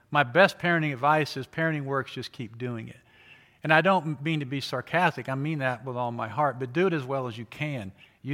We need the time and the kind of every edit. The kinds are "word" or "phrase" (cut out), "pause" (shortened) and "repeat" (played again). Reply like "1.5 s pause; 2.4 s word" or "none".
none